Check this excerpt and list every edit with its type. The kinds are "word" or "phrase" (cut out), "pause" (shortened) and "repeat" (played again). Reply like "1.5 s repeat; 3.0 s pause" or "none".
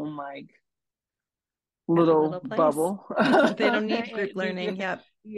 none

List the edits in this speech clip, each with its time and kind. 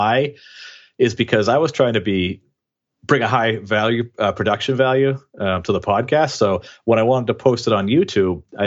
none

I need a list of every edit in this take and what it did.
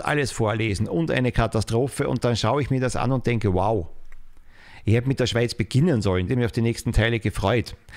6.3 s word

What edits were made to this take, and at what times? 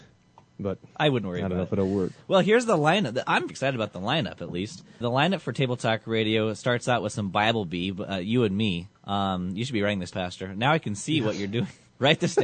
3.5 s word; 5.0 s word; 8.9 s pause; 10.1 s word

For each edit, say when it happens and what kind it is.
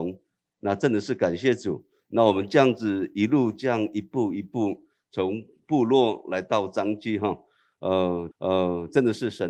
8.3 s repeat

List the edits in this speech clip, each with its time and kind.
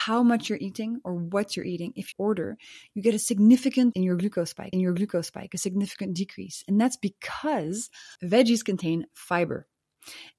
2.1 s phrase; 3.9 s word; 4.7 s repeat; 8.2 s pause

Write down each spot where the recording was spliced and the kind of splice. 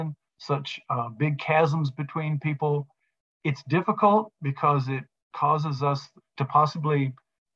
none

